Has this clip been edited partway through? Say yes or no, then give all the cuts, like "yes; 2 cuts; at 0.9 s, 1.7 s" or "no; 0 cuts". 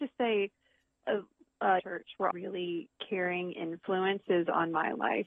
yes; 2 cuts; at 1.8 s, 2.3 s